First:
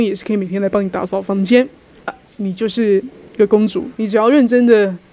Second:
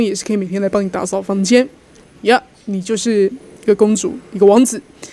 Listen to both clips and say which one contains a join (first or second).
first